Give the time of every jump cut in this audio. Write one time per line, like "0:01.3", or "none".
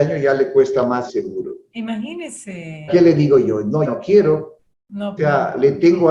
0:01.1
0:02.9
0:03.8
0:05.2